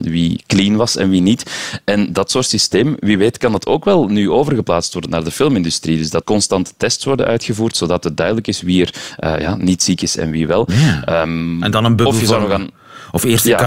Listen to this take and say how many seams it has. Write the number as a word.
two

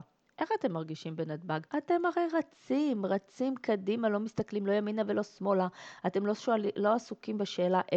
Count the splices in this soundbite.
one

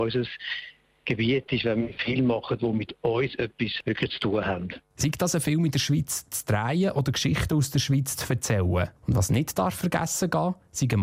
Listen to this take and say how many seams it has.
one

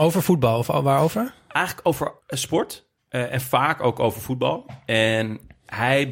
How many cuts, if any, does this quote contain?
one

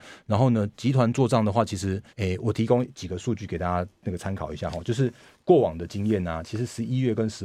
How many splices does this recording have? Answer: one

